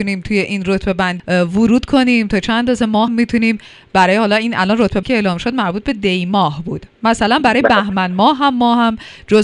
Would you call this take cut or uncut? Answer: cut